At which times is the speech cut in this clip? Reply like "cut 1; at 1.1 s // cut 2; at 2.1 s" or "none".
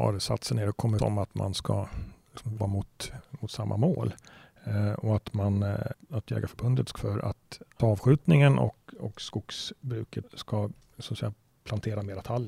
cut 1; at 1.0 s // cut 2; at 2.6 s // cut 3; at 5.9 s // cut 4; at 7.0 s // cut 5; at 7.8 s // cut 6; at 10.2 s